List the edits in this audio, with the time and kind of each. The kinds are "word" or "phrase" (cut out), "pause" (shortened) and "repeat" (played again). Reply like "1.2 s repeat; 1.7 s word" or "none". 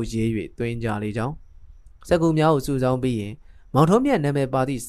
none